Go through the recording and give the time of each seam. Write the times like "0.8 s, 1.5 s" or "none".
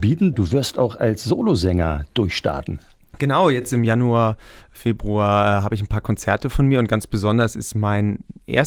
none